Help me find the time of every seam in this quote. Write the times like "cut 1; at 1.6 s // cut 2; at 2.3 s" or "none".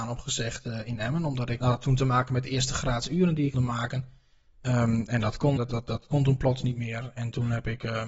cut 1; at 1.6 s // cut 2; at 3.5 s // cut 3; at 5.6 s